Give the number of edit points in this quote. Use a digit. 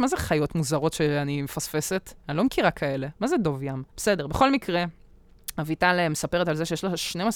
2